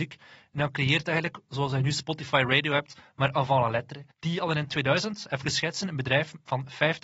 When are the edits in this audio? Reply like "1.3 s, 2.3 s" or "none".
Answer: 4.1 s